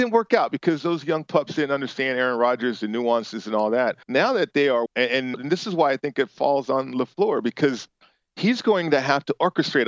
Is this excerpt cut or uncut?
cut